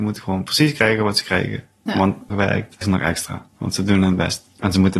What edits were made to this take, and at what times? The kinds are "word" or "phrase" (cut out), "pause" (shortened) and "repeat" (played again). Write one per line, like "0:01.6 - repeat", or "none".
0:02.3 - phrase
0:02.8 - phrase
0:03.5 - pause